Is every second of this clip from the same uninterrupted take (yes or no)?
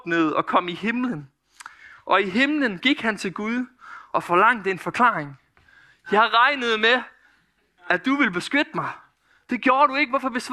yes